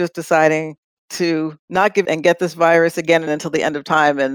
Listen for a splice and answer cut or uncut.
cut